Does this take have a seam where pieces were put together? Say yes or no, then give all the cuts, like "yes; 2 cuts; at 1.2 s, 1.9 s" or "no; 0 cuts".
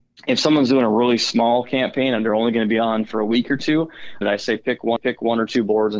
yes; 2 cuts; at 4.2 s, 5.0 s